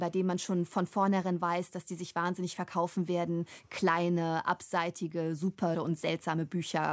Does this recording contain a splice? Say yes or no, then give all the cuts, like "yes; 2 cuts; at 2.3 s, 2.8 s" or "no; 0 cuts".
yes; 1 cut; at 5.7 s